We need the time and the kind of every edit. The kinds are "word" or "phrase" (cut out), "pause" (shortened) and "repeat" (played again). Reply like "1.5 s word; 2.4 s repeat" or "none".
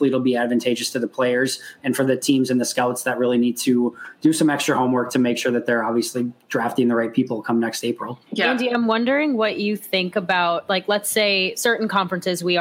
8.3 s pause